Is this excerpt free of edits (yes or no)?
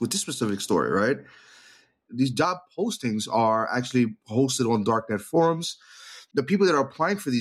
yes